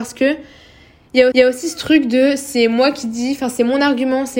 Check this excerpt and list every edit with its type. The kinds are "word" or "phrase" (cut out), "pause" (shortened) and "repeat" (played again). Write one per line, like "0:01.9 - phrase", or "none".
0:01.3 - repeat

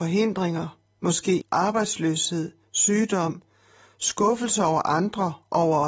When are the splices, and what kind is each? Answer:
0:01.4 - word

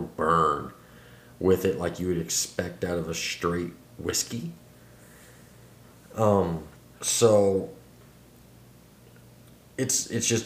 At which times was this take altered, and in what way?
0:06.8 - pause

